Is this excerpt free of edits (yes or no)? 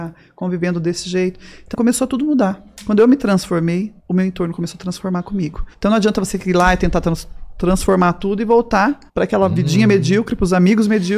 no